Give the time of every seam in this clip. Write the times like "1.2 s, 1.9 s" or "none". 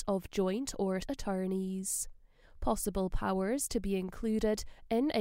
1.0 s

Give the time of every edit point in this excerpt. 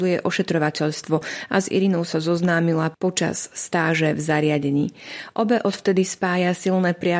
none

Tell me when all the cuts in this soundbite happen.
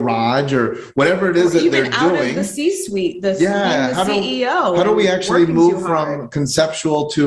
none

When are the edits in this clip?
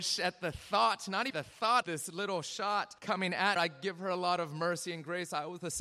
1.3 s, 1.8 s, 3.0 s, 3.6 s

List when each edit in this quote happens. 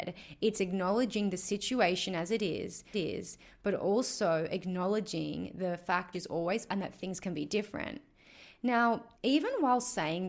2.9 s, 6.1 s, 6.7 s, 9.1 s

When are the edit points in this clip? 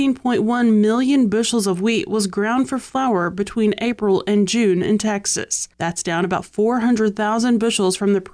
none

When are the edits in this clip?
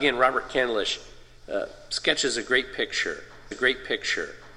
3.5 s

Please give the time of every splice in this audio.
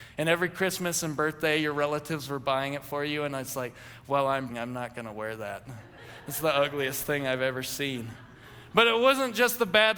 4.5 s

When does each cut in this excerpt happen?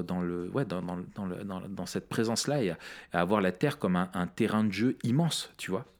none

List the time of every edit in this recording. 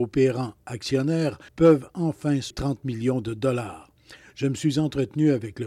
1.5 s, 2.5 s

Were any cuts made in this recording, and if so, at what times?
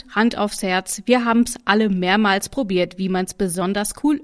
none

